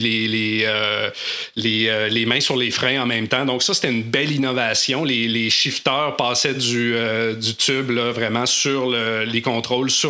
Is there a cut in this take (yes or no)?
no